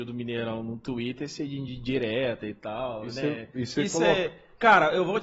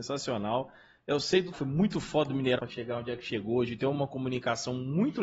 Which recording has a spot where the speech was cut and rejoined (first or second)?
second